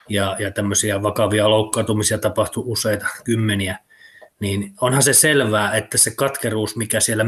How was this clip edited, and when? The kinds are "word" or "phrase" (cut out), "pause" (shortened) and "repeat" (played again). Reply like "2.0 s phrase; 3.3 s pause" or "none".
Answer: none